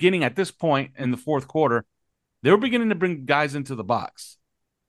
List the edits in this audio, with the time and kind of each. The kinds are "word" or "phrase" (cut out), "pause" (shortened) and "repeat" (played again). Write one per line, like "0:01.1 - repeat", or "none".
none